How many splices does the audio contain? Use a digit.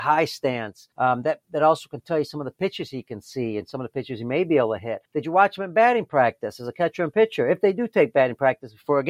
2